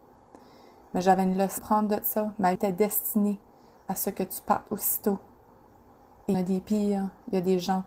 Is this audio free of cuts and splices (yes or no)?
no